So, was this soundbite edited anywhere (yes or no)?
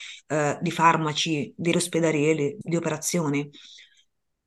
yes